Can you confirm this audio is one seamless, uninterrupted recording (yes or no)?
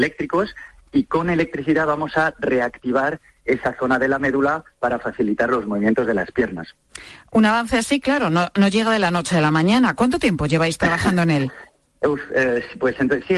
no